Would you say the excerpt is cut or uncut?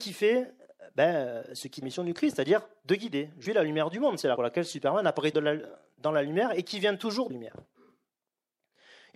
cut